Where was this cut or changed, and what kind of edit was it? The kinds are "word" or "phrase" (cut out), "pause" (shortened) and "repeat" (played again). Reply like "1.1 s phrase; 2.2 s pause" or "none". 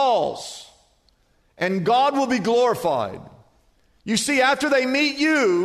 none

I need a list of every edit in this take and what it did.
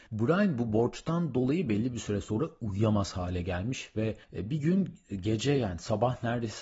4.2 s pause

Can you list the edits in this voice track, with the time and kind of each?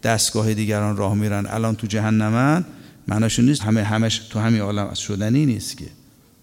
3.6 s word

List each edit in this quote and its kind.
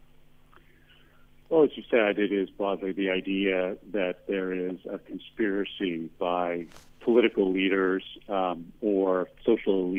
none

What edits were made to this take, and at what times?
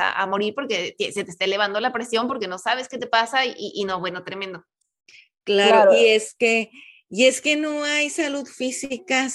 none

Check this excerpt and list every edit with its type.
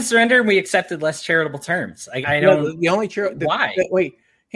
2.2 s word

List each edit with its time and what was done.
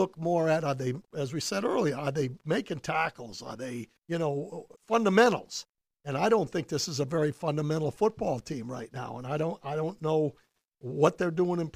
1.0 s pause; 4.0 s pause; 4.8 s pause

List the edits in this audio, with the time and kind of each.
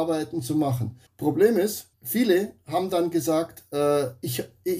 1.1 s pause; 1.9 s pause

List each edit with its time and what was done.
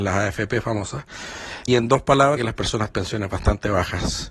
1.7 s word; 2.4 s word; 2.9 s word

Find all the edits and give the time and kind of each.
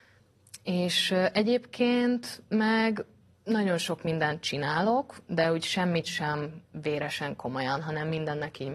3.3 s pause

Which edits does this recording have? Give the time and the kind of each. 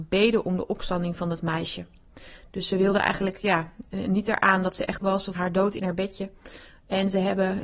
5.0 s word; 5.4 s word

